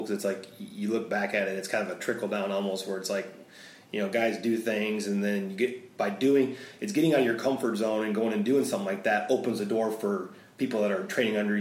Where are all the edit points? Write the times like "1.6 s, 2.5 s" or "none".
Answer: none

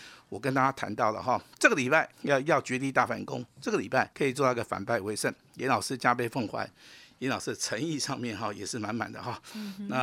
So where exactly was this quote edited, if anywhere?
2.1 s, 4.1 s

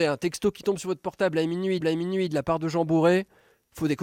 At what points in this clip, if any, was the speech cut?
1.8 s

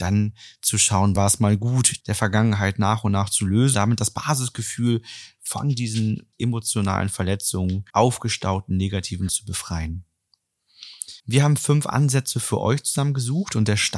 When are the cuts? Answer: 1.2 s, 2.0 s, 3.7 s, 6.3 s, 7.9 s, 9.3 s, 11.2 s

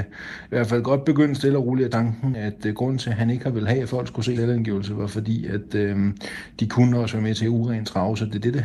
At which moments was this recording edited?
1.9 s, 4.4 s, 7.4 s

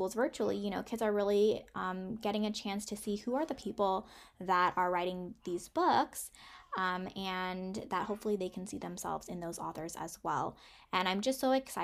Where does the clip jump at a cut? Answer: none

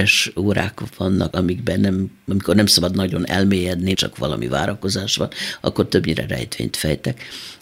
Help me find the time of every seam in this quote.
1.3 s, 3.9 s

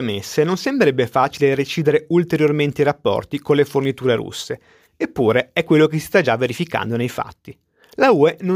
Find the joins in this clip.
none

